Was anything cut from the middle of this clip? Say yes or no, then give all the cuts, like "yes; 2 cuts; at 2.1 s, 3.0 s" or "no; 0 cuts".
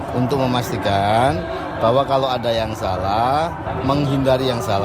no; 0 cuts